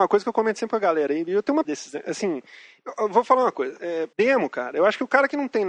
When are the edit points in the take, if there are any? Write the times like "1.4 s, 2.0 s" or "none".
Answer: 1.6 s, 4.1 s